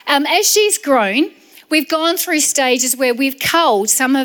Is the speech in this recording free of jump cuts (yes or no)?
yes